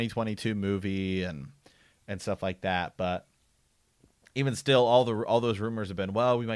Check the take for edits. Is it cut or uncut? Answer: uncut